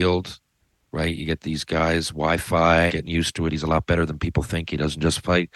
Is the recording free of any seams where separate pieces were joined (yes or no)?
no